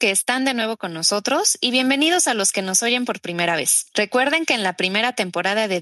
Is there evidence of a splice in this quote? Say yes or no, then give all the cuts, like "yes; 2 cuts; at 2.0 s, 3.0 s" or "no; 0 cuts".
yes; 1 cut; at 3.9 s